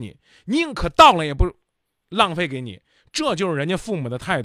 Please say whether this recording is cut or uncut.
uncut